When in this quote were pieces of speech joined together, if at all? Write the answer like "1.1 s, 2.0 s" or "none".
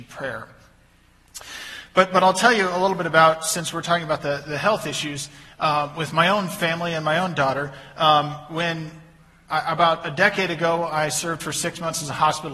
none